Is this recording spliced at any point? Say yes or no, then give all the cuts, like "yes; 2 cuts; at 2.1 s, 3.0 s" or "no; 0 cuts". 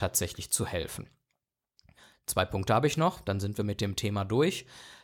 no; 0 cuts